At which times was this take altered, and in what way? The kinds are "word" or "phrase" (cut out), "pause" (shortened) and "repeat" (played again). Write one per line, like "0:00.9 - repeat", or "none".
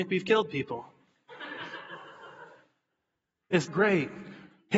0:03.7 - word

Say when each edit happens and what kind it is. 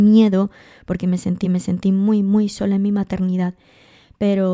0:01.4 - repeat

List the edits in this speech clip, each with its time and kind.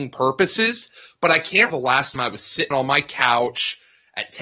0:01.7 - word
0:02.2 - word
0:02.7 - word

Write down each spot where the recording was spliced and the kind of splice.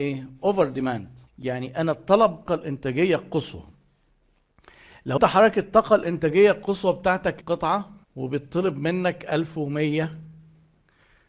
0:01.3 - pause
0:02.5 - phrase
0:05.2 - word
0:07.4 - word
0:08.0 - pause

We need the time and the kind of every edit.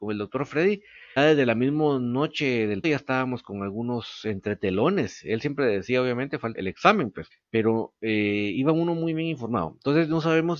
0:01.2 - word
0:02.8 - word
0:06.5 - word
0:07.3 - word

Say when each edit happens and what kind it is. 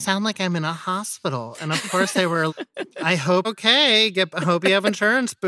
0:02.5 - word
0:03.4 - word

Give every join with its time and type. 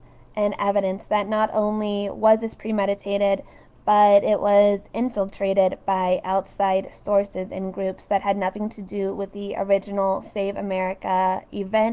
none

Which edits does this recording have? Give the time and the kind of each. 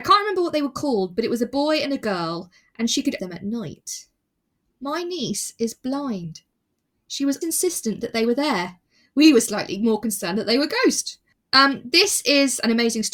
0:03.2 - phrase
0:07.4 - word

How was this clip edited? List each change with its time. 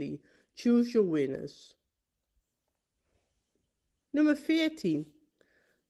none

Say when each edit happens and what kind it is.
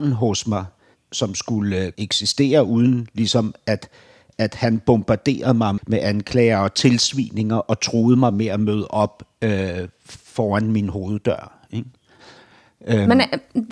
0:01.9 - word
0:05.8 - word

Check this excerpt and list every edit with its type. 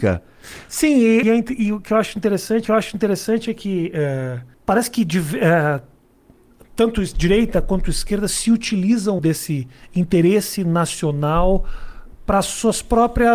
0:01.2 - word
0:02.6 - repeat
0:04.5 - pause
0:09.2 - word

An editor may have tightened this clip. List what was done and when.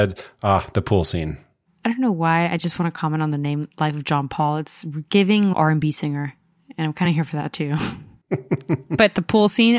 none

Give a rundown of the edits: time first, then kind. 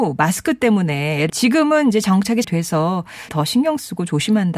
0:01.3 - word
0:02.4 - word
0:03.3 - word

